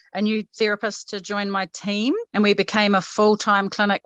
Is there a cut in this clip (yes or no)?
no